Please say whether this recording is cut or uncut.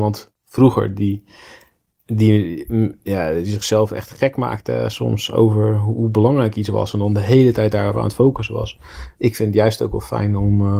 uncut